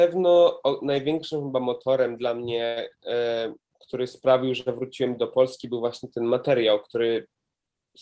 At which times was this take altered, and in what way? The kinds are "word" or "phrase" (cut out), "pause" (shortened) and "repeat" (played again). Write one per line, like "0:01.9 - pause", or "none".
none

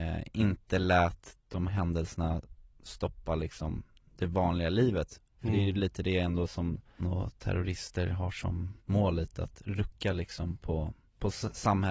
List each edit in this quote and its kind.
0:01.7 - word
0:05.3 - pause
0:07.0 - word
0:08.8 - pause

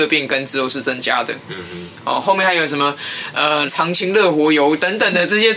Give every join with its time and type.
0:03.7 - phrase

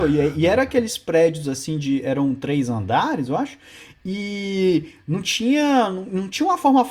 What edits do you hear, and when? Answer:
none

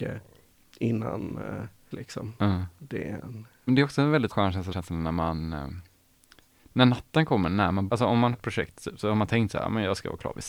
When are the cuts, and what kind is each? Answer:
0:01.9 - word
0:03.7 - word
0:04.3 - word
0:04.7 - word
0:07.9 - word
0:08.3 - word

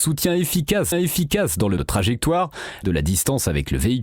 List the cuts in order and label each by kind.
0:00.9 - repeat
0:01.8 - word
0:02.8 - phrase

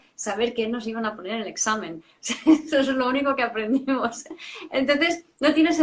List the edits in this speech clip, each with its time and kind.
none

